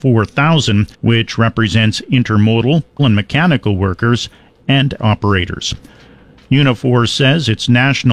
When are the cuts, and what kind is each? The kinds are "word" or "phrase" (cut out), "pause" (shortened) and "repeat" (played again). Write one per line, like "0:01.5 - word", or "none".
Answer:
0:00.9 - pause
0:03.0 - word
0:05.0 - word